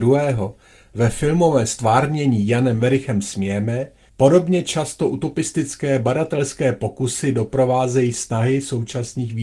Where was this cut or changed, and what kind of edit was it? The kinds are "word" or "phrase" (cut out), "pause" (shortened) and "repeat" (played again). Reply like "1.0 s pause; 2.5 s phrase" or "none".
4.1 s pause